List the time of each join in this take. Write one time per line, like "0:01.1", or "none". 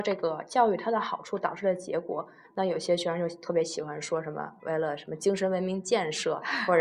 none